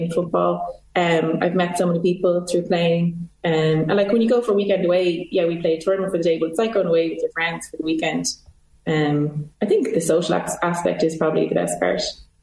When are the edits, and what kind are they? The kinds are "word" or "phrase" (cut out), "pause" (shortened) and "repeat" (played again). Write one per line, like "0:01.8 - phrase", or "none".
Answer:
0:03.4 - pause
0:09.5 - pause

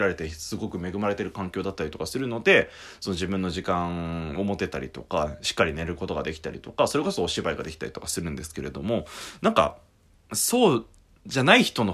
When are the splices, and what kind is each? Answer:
0:10.2 - pause

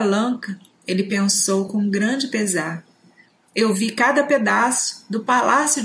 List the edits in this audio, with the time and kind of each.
none

